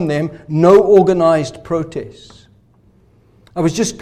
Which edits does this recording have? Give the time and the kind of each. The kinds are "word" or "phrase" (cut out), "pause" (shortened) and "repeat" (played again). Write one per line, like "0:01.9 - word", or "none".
none